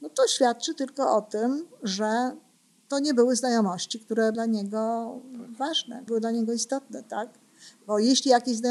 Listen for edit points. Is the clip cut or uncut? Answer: cut